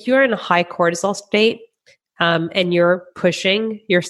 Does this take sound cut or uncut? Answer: uncut